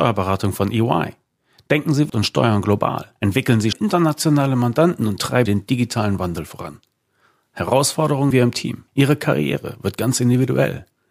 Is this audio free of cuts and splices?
no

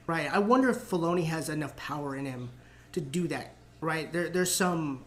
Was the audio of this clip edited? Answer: no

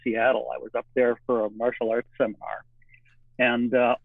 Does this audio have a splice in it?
no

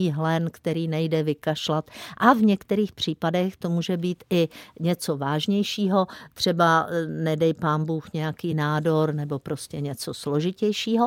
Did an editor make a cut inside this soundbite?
no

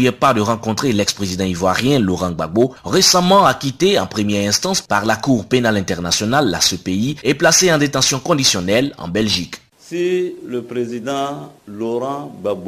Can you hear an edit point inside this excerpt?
no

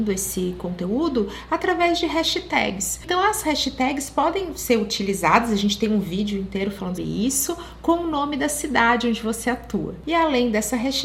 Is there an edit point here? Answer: yes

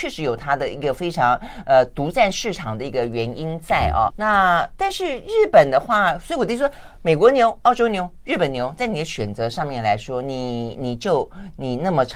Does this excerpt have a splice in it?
yes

